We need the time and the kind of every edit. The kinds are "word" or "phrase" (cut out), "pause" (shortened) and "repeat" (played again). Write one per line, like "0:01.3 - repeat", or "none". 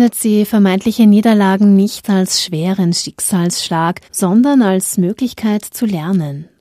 0:04.1 - pause